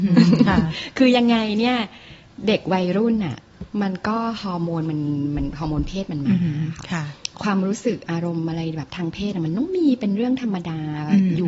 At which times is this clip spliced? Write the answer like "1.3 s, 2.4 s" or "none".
7.3 s